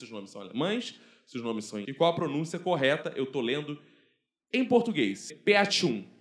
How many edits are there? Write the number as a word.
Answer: two